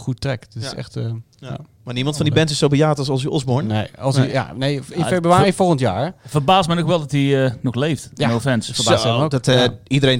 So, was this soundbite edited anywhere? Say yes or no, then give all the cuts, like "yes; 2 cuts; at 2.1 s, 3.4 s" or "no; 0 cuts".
no; 0 cuts